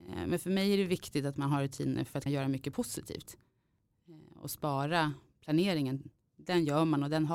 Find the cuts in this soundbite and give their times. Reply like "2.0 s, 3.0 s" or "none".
2.3 s, 6.2 s